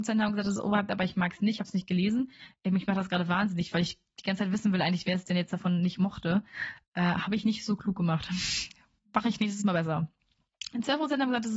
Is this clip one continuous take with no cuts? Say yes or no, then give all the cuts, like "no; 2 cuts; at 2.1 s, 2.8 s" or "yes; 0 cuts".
yes; 0 cuts